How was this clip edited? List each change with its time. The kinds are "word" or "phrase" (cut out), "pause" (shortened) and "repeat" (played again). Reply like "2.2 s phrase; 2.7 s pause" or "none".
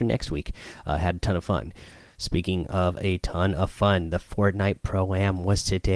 none